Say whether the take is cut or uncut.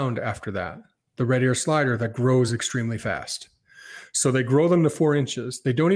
uncut